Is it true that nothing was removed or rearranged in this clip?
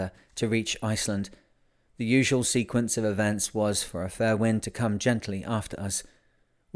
yes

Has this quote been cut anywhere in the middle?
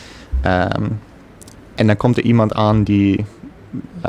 no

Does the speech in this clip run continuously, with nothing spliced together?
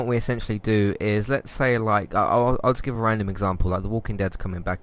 yes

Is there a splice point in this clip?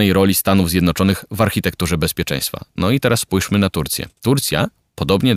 yes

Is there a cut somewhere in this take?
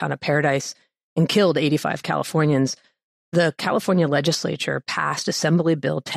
no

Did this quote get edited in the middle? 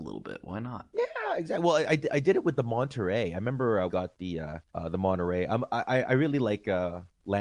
yes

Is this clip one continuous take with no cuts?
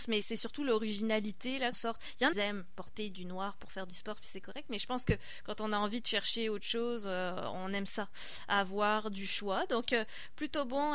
no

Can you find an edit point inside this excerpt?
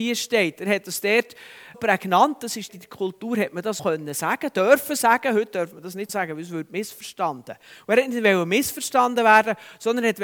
yes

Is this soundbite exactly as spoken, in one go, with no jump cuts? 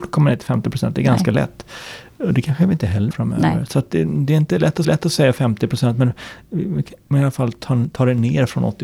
no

